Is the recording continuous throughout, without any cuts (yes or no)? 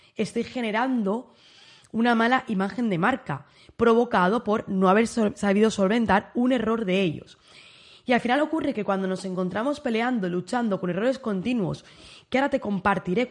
yes